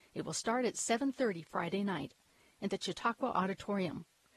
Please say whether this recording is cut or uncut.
uncut